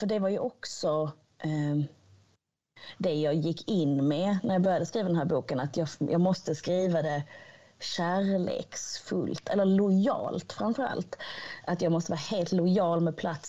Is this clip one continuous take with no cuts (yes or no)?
yes